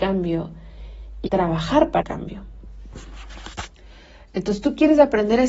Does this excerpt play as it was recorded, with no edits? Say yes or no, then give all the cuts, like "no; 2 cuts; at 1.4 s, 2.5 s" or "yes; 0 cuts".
no; 2 cuts; at 1.3 s, 2.0 s